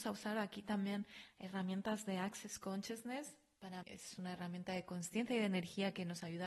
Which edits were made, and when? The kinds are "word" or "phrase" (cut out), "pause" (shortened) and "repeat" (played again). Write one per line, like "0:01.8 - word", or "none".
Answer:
0:03.8 - word